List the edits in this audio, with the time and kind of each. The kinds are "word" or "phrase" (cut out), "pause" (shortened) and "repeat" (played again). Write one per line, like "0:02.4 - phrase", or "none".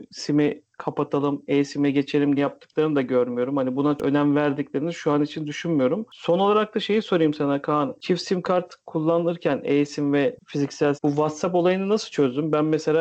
0:02.4 - phrase
0:04.0 - word
0:11.0 - word